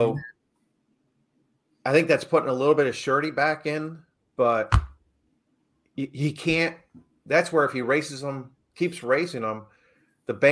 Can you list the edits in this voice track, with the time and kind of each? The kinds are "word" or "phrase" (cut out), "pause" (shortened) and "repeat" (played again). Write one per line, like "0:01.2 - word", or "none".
none